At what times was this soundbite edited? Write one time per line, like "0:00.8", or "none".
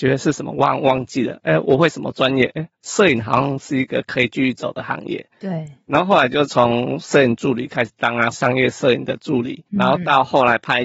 0:02.7
0:08.3
0:09.7